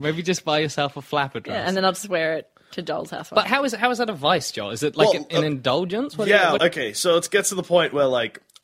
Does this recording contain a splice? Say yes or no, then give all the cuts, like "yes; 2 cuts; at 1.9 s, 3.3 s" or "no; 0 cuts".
yes; 2 cuts; at 3.4 s, 6.6 s